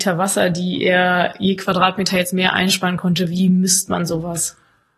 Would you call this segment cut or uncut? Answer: uncut